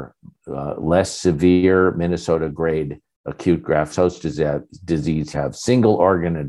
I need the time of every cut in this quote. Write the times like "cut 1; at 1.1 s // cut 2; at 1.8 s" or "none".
cut 1; at 3.9 s // cut 2; at 5.3 s